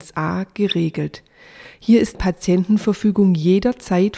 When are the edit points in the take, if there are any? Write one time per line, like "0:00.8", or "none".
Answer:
0:02.1